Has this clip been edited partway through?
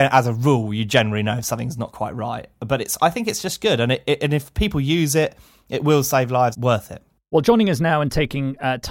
yes; 1 cut; at 6.5 s

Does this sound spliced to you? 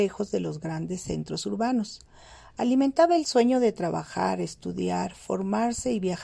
no; 0 cuts

